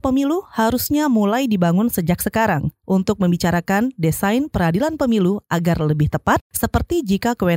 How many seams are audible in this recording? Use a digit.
1